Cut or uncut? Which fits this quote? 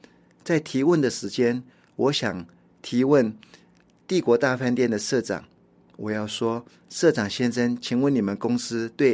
uncut